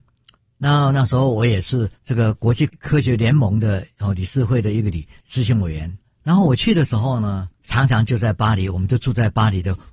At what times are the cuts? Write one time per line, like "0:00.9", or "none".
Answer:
0:02.0
0:03.9
0:06.0
0:07.5